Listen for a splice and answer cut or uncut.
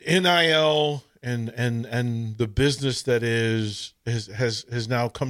uncut